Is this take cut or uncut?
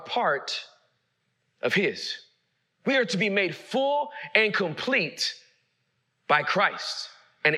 uncut